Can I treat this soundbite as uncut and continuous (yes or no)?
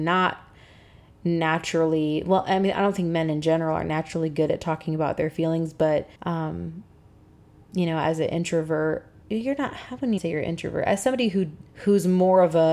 no